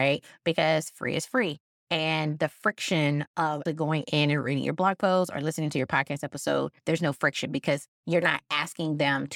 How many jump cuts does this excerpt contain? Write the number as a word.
one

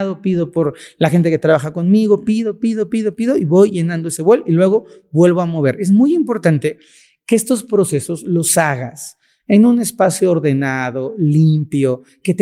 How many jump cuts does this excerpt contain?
zero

